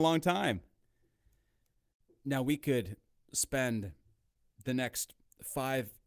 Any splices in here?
no; 0 cuts

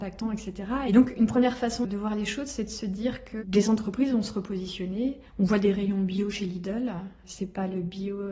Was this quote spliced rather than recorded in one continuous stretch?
yes; 1 cut; at 1.8 s

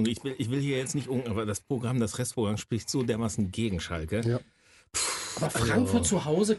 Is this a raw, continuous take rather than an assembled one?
yes; 0 cuts

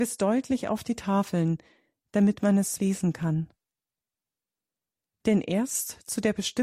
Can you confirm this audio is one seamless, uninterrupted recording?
no; 1 cut; at 2.8 s

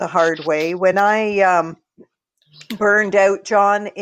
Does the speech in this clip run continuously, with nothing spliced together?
yes; 0 cuts

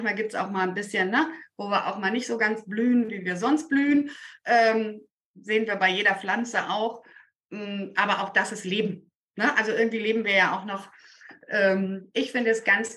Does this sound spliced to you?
no; 0 cuts

